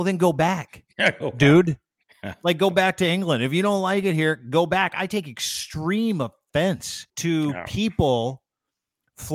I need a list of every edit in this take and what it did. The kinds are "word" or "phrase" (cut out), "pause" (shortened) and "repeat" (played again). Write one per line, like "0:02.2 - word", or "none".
0:07.1 - pause